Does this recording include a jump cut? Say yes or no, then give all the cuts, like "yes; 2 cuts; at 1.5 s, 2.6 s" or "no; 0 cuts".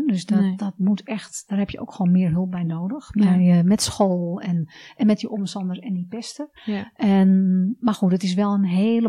yes; 1 cut; at 6.6 s